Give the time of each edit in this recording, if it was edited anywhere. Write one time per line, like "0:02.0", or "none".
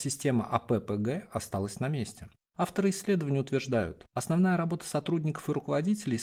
none

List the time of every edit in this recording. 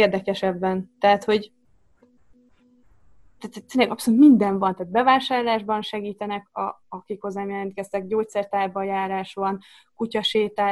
none

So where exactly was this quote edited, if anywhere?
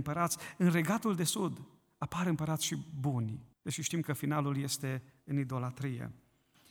0:03.5

